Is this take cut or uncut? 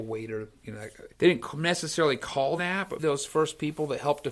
cut